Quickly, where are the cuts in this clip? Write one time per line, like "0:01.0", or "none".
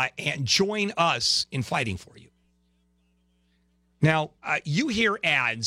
0:04.4